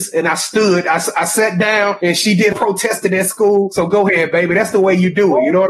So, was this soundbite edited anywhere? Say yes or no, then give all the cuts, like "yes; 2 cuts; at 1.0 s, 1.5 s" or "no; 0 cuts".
yes; 1 cut; at 2.5 s